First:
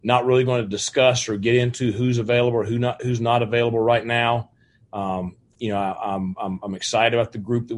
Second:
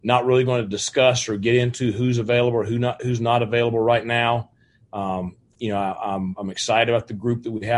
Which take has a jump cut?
second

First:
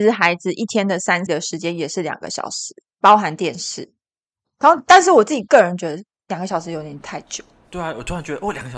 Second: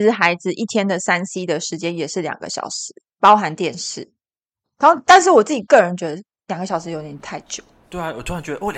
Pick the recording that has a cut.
first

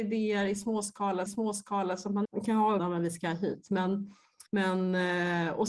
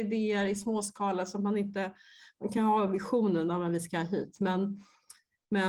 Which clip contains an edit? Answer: first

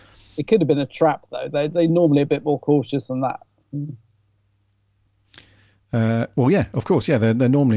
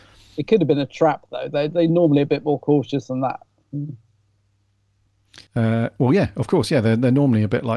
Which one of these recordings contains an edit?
second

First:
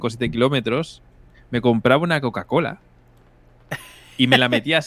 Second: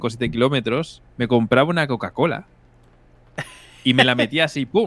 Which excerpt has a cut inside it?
second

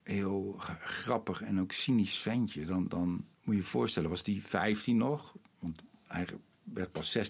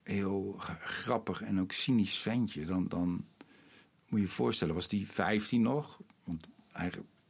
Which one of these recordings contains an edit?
first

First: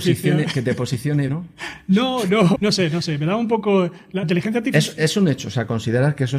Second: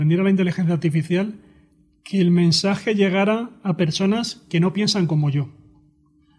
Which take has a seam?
first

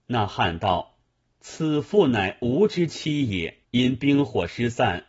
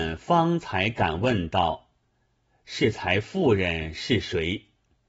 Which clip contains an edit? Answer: first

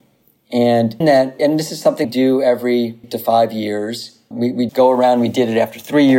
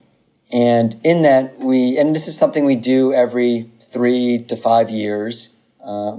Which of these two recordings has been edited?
first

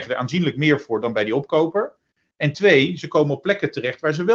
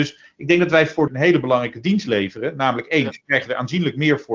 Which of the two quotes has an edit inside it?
second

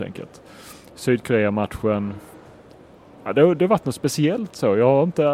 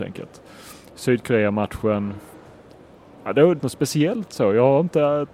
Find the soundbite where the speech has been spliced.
second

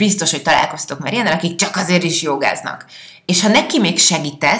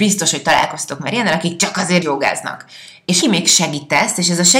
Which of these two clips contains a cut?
second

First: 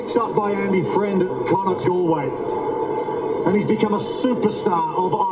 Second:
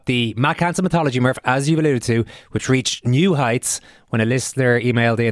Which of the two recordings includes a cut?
first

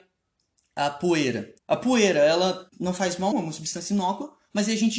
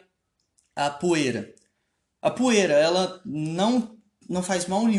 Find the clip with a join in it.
first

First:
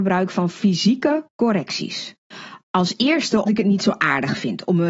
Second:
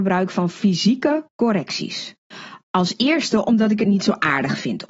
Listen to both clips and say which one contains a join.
first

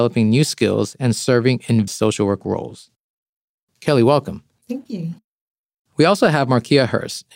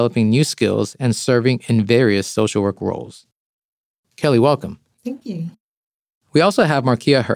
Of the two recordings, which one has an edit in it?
first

